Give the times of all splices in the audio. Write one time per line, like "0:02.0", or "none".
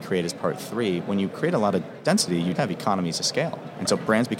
0:02.5